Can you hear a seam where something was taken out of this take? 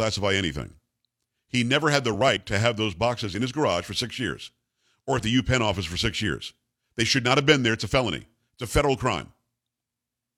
no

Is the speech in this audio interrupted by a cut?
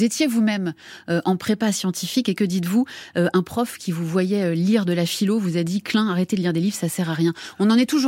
no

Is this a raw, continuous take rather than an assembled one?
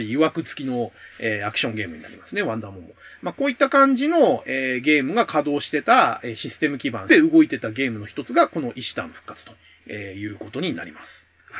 yes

